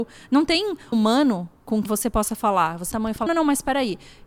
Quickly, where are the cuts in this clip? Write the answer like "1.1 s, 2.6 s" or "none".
0.9 s, 1.9 s, 2.9 s, 3.3 s